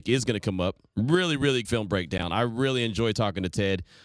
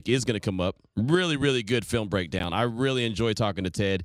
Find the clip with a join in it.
first; 1 cut; at 1.6 s

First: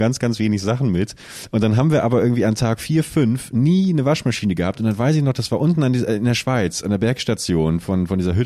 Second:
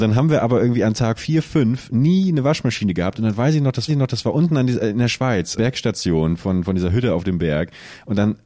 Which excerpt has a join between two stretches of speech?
second; 2 cuts; at 3.9 s, 5.6 s

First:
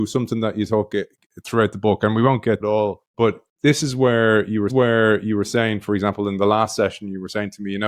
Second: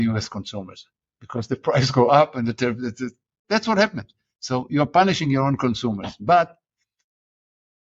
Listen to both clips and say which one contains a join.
first; 3 cuts; at 2.6 s, 3.1 s, 4.7 s

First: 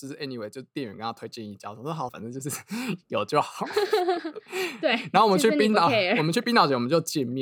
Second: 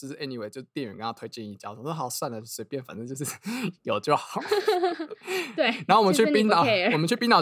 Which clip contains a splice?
first; 1 cut; at 2.1 s

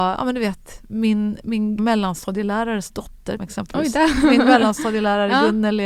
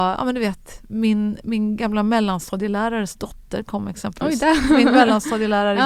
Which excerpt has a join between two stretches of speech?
first; 2 cuts; at 1.8 s, 3.4 s

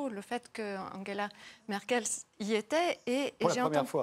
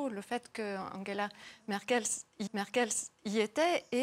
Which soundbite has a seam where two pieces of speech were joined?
second; 1 cut; at 2.5 s

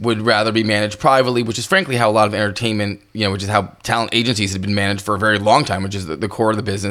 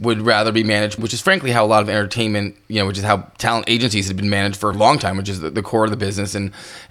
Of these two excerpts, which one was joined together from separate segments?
second; 2 cuts; at 1.0 s, 4.7 s

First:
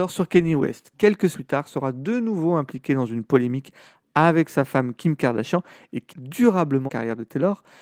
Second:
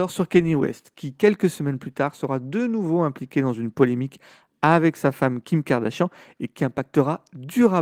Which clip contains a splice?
first; 4 cuts; at 0.9 s, 1.3 s, 6.1 s, 6.9 s

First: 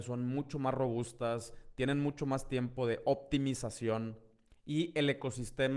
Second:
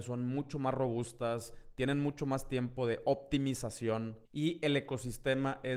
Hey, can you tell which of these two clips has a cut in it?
second; 1 cut; at 4.3 s

